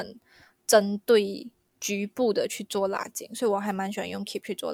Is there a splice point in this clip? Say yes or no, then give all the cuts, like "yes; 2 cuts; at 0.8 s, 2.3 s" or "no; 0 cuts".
no; 0 cuts